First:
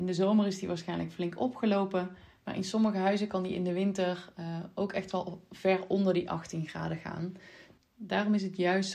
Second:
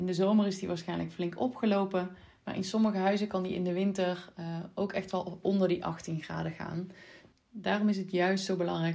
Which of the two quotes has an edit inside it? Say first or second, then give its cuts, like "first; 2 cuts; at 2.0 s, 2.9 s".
second; 1 cut; at 5.4 s